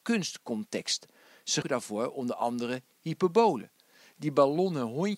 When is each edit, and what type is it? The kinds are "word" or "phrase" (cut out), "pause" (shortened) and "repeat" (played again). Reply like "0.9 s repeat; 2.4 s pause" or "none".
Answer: 1.6 s word